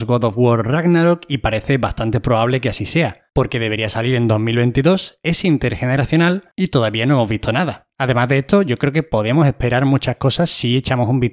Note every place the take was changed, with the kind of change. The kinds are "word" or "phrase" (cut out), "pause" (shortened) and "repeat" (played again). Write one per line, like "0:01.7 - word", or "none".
0:07.9 - pause